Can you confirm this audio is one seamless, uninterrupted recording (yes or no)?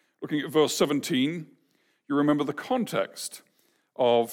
yes